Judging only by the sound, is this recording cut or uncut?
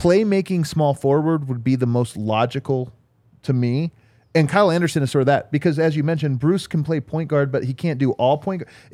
uncut